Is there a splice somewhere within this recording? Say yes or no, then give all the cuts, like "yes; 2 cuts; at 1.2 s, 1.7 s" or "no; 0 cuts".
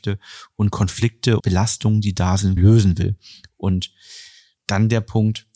yes; 2 cuts; at 1.4 s, 2.6 s